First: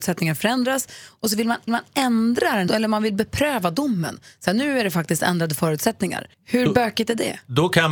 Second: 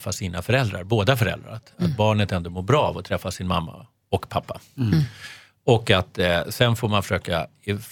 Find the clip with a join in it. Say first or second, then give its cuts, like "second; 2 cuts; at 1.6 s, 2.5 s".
first; 3 cuts; at 1.7 s, 2.7 s, 6.3 s